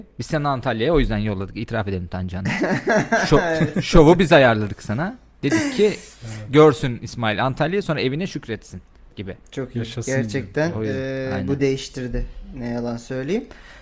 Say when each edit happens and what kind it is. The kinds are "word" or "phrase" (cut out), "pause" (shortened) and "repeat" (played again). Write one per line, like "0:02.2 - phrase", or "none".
0:11.6 - phrase